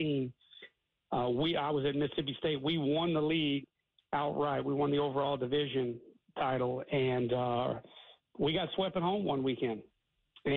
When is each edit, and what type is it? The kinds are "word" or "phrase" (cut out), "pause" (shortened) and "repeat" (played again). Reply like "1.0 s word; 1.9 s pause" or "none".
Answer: none